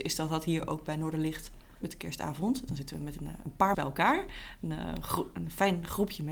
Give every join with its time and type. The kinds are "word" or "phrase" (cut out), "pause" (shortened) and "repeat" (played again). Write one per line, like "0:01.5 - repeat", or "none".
0:01.8 - word
0:03.7 - word